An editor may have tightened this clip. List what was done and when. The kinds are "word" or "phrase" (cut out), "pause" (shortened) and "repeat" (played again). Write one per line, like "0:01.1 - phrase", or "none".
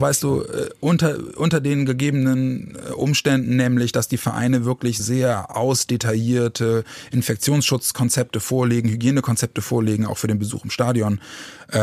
0:05.0 - word